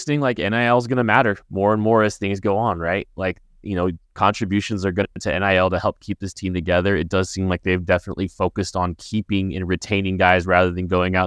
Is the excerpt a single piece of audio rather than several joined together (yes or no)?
no